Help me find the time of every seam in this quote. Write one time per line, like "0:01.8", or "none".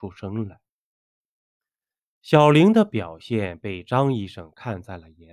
none